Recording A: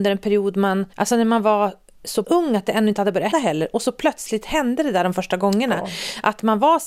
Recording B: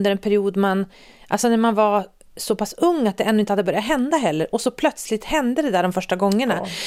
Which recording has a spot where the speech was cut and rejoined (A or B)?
A